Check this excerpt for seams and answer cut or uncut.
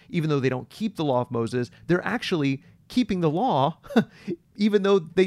uncut